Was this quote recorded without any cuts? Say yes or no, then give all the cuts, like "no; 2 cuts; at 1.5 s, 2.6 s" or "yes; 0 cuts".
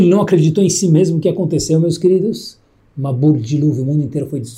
yes; 0 cuts